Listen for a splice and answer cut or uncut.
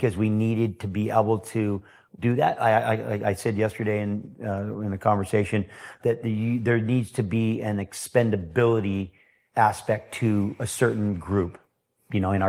uncut